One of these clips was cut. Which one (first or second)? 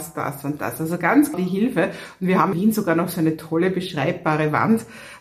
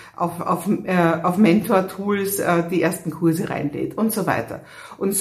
first